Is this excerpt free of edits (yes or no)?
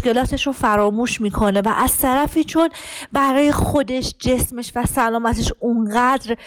yes